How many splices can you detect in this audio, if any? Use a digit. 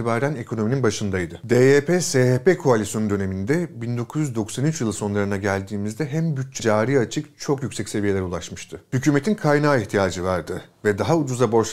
1